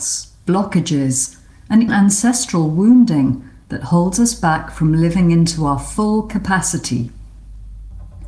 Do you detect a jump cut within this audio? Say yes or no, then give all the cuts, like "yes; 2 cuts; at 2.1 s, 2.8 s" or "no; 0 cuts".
yes; 1 cut; at 1.9 s